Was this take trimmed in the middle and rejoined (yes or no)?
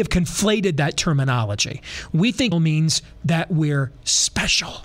yes